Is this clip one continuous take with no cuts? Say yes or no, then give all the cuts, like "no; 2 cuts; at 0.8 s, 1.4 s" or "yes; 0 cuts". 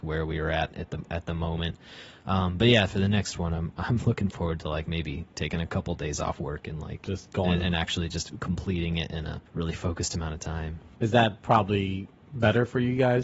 no; 3 cuts; at 7.0 s, 9.5 s, 10.9 s